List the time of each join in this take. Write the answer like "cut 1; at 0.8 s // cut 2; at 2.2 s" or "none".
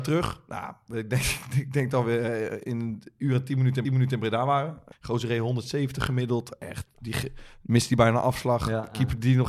cut 1; at 3.8 s // cut 2; at 4.9 s